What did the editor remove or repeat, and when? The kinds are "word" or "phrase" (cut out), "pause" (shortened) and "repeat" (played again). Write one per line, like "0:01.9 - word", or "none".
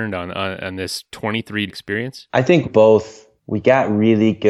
0:01.1 - word
0:01.7 - word
0:02.3 - pause
0:02.6 - word
0:03.4 - pause